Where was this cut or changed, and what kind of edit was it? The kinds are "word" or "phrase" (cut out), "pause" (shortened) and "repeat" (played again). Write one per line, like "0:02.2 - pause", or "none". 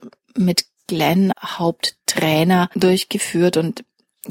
0:01.3 - word